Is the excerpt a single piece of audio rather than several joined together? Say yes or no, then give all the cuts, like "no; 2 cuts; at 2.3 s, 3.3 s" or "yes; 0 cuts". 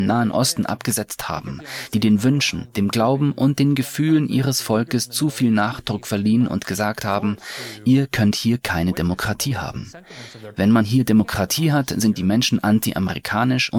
yes; 0 cuts